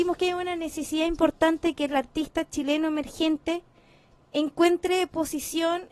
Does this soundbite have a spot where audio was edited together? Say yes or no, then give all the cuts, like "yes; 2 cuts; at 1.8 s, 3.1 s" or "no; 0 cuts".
no; 0 cuts